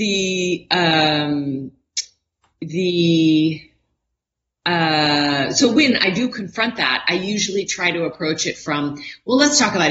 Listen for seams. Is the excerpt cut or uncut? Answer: uncut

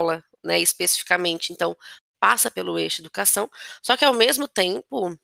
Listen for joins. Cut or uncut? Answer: uncut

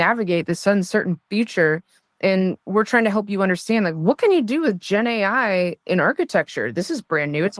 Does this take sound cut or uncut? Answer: uncut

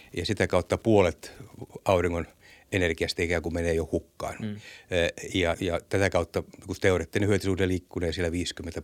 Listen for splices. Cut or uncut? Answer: cut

